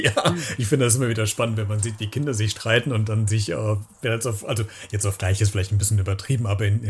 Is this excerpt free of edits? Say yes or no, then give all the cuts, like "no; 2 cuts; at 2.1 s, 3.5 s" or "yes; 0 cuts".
yes; 0 cuts